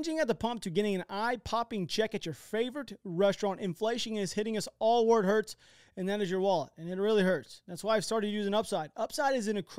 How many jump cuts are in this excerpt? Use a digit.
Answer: 0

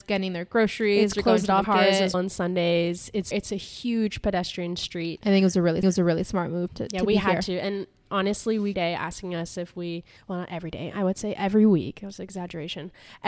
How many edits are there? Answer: 7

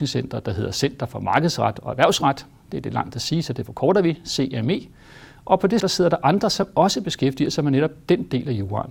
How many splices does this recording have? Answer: 1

